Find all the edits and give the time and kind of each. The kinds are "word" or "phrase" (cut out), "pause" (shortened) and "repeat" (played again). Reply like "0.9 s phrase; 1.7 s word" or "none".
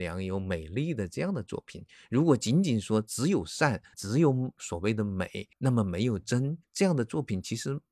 none